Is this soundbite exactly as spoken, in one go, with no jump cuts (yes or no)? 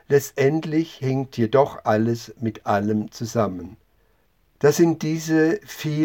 no